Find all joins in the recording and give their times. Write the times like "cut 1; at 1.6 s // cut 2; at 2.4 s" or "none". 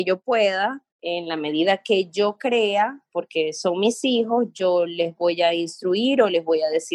cut 1; at 0.9 s

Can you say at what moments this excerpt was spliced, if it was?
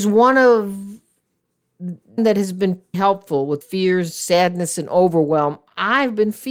cut 1; at 2.2 s // cut 2; at 2.9 s // cut 3; at 3.6 s

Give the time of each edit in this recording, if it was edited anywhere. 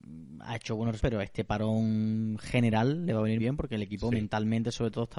cut 1; at 1.0 s // cut 2; at 3.4 s

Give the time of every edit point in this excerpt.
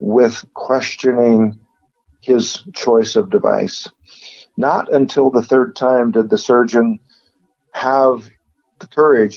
none

